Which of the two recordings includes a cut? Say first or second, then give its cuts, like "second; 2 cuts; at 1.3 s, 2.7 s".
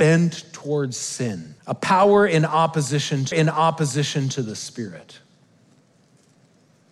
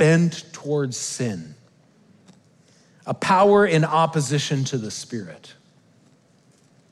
first; 2 cuts; at 1.6 s, 3.3 s